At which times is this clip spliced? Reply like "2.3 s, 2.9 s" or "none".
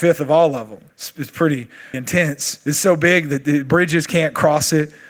0.9 s, 1.9 s